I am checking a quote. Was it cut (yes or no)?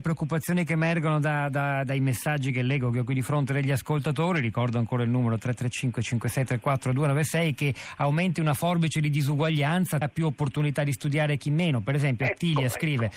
yes